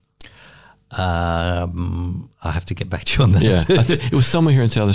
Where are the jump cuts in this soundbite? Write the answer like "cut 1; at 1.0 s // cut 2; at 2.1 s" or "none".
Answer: none